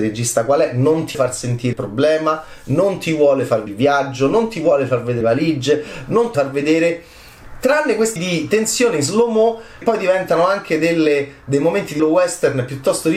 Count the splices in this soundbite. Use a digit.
8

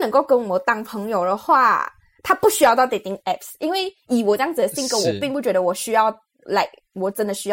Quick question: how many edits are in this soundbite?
0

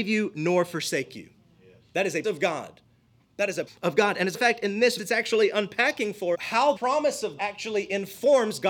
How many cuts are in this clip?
7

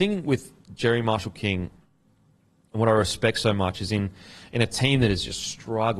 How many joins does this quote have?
0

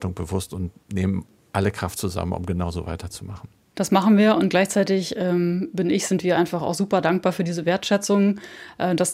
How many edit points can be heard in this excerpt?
0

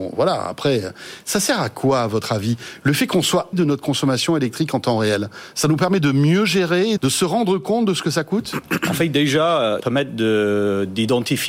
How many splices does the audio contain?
3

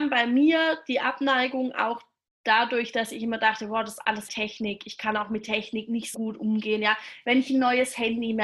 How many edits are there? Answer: 2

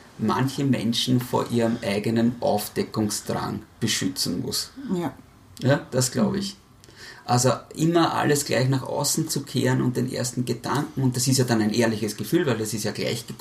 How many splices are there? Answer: 0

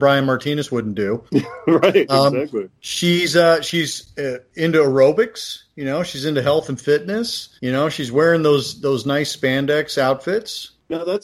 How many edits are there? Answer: 3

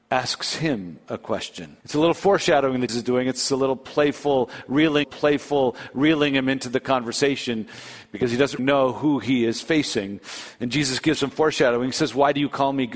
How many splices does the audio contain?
5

